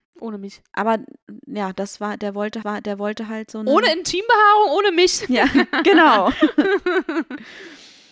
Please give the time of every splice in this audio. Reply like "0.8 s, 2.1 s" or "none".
2.6 s